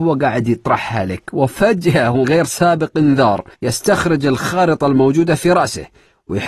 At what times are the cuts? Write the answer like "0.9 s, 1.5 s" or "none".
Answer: 2.2 s, 3.5 s

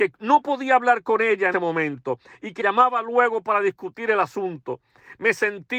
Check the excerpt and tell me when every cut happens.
1.5 s, 2.6 s

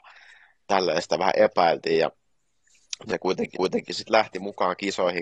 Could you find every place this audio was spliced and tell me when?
3.1 s, 3.5 s

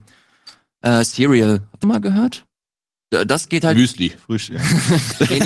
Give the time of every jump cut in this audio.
1.8 s

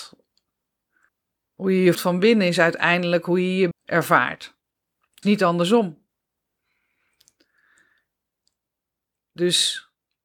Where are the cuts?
1.1 s, 1.9 s, 3.7 s, 5.2 s

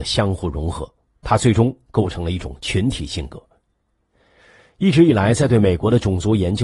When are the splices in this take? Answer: none

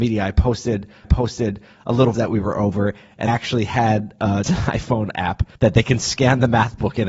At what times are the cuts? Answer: 1.0 s, 2.1 s, 3.3 s, 4.4 s, 5.5 s

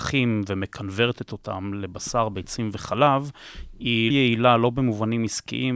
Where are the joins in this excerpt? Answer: 4.1 s

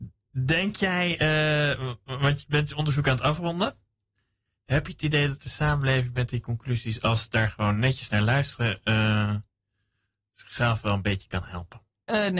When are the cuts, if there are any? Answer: none

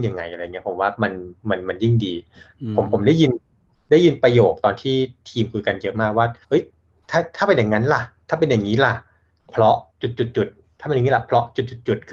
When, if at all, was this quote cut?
1.4 s, 6.4 s, 9.9 s

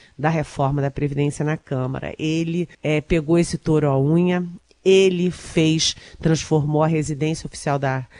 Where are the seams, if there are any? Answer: 2.7 s

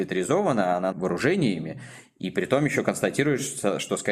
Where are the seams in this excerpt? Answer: 0.9 s

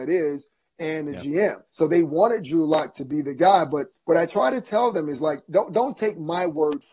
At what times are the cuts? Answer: 1.7 s, 3.9 s

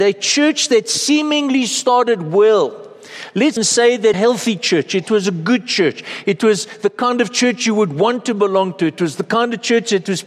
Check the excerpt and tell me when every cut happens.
3.6 s, 4.1 s

